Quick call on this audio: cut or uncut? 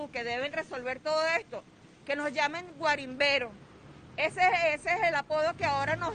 uncut